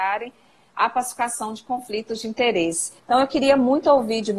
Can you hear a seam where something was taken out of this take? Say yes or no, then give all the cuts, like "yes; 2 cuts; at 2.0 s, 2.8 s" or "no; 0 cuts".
yes; 1 cut; at 3.0 s